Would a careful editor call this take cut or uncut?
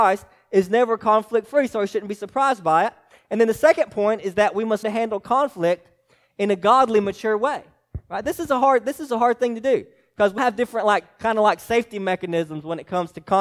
cut